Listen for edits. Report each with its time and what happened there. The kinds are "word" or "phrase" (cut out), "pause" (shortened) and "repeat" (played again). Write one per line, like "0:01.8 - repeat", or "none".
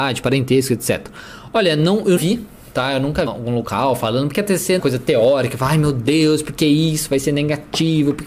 0:02.2 - word
0:03.3 - phrase
0:04.8 - phrase